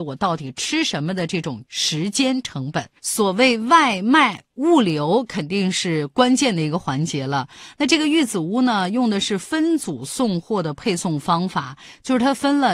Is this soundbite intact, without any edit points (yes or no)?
no